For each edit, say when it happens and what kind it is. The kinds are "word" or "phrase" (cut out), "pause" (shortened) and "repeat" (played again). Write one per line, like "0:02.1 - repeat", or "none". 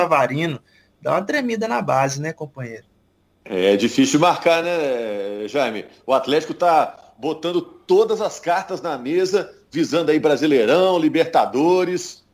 none